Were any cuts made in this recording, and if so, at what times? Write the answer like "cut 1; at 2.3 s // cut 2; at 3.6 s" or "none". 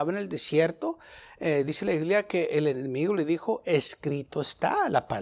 none